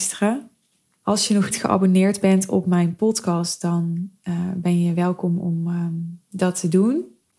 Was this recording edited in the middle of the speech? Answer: yes; 1 cut; at 1.5 s

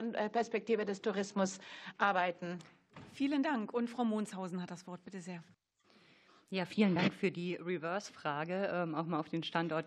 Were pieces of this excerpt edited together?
no; 0 cuts

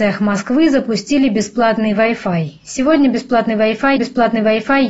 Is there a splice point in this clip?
yes; 1 cut; at 4.0 s

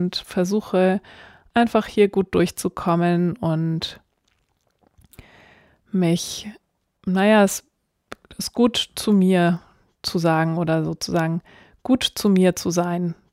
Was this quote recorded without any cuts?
yes; 0 cuts

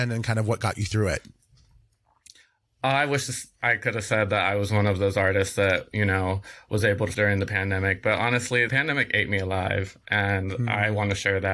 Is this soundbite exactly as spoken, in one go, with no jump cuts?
no; 2 cuts; at 7.1 s, 8.7 s

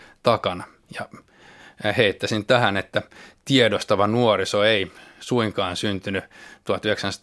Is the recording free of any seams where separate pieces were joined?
yes; 0 cuts

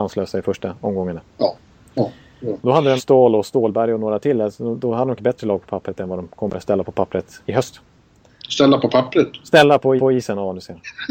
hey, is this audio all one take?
no; 5 cuts; at 2.6 s, 3.0 s, 5.2 s, 7.4 s, 10.0 s

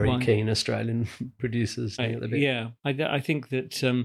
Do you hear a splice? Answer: yes; 2 cuts; at 2.0 s, 2.8 s

